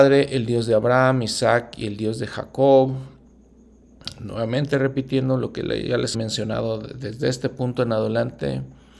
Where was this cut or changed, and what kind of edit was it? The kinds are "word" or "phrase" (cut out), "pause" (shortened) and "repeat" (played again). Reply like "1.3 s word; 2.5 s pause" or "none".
6.1 s word